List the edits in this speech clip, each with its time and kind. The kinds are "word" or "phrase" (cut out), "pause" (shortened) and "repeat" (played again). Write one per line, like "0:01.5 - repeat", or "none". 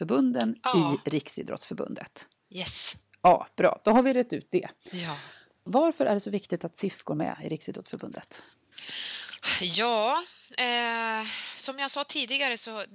0:04.8 - pause